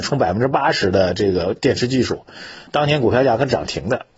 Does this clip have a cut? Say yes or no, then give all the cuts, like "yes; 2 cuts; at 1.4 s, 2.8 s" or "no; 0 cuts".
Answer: yes; 1 cut; at 2.7 s